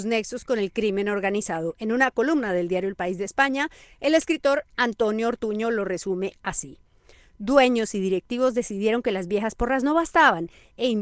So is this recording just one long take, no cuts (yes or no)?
yes